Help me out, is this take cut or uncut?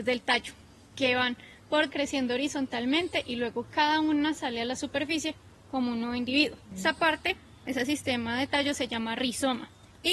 cut